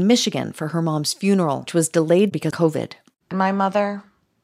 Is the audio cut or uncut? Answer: cut